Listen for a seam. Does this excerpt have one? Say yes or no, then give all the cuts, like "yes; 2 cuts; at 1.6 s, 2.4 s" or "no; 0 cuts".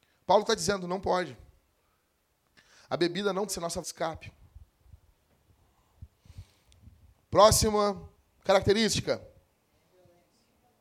yes; 3 cuts; at 3.5 s, 3.8 s, 8.1 s